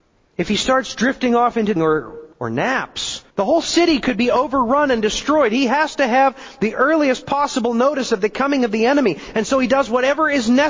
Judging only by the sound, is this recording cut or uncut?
cut